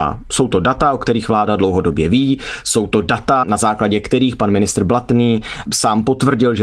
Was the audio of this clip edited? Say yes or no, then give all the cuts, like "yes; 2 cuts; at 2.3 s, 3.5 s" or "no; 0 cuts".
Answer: no; 0 cuts